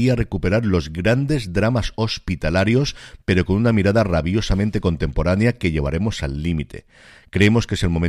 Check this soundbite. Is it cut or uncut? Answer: uncut